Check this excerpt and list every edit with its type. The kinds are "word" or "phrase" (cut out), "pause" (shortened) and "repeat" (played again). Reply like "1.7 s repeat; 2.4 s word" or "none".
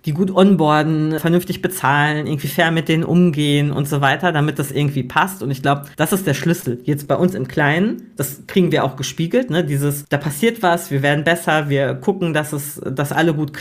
5.9 s pause